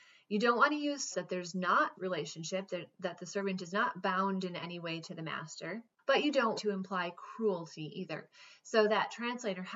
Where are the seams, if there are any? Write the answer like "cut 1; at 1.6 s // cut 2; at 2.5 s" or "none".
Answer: cut 1; at 1.1 s // cut 2; at 1.9 s // cut 3; at 6.0 s // cut 4; at 6.6 s